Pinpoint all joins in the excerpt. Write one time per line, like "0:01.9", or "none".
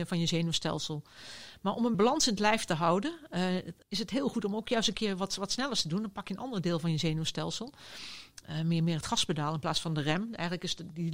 0:01.9
0:03.8

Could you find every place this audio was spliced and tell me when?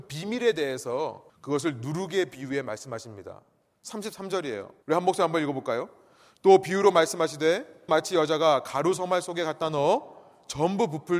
0:01.3
0:04.8
0:07.9

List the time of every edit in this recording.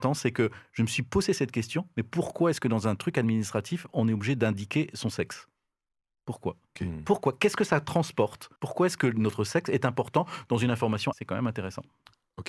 0:08.6
0:11.1

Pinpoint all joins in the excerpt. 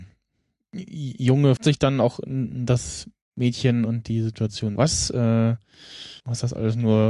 0:01.6
0:04.8
0:06.2

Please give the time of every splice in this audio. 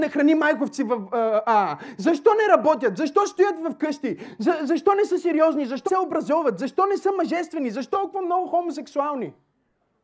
0:05.9
0:07.9

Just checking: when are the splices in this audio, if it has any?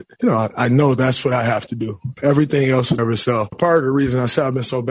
0:03.0
0:03.5

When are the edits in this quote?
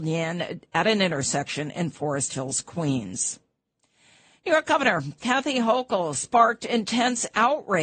none

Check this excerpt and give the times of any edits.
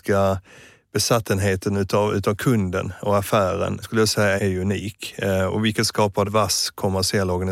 0:03.8
0:04.4
0:06.2

